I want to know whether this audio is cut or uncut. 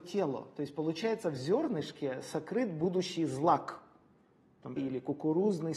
cut